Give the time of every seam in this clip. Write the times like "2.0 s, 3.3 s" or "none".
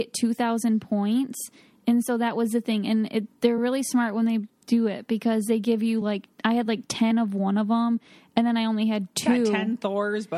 none

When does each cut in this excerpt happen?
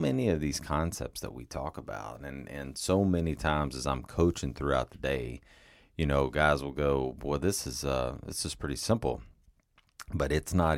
none

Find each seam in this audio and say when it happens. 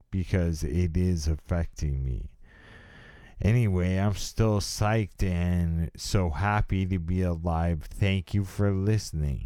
none

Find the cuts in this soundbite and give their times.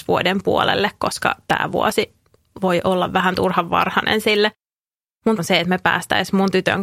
5.4 s

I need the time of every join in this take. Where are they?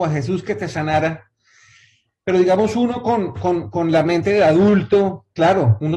none

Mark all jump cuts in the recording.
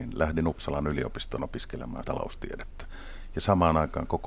2.0 s

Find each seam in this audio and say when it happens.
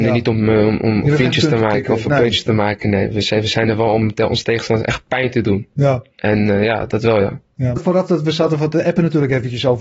7.8 s

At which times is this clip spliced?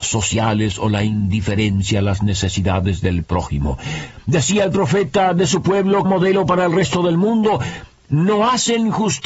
6.0 s

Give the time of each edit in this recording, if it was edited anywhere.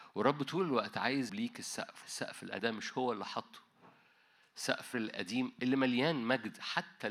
1.3 s, 2.0 s, 2.6 s, 4.9 s

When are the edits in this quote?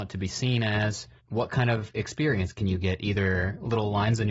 1.2 s

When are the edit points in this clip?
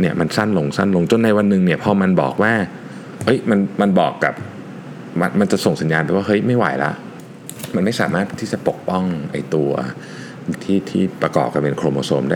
10.5 s

